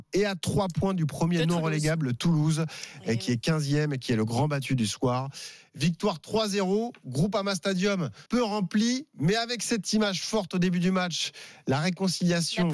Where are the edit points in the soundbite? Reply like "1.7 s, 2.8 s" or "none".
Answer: 8.3 s